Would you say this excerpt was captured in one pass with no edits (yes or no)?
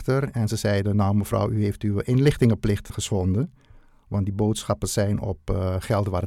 no